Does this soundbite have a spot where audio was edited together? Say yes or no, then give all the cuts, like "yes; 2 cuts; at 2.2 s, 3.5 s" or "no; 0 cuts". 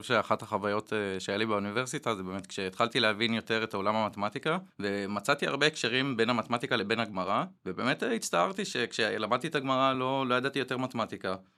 no; 0 cuts